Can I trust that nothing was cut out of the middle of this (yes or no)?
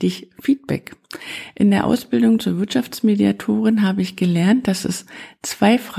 yes